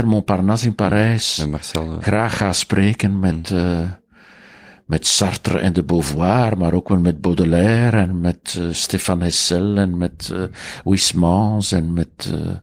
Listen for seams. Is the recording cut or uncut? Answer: uncut